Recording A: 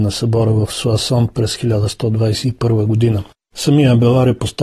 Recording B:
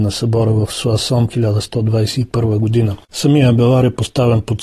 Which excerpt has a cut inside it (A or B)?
B